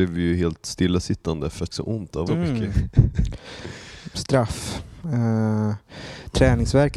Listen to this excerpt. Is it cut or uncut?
cut